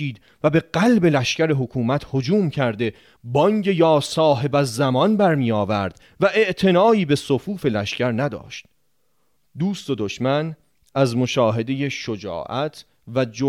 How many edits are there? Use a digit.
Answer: 0